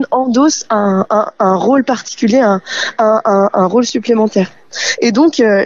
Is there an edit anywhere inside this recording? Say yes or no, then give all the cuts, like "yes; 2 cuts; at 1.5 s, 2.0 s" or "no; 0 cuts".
no; 0 cuts